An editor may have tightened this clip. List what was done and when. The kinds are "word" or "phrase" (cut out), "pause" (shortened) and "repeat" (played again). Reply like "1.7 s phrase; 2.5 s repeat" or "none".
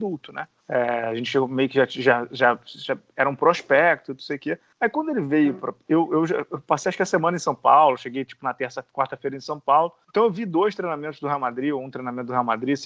none